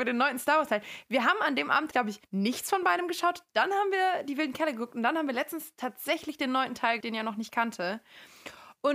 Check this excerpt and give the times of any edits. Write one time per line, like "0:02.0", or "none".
0:01.9
0:02.2
0:07.0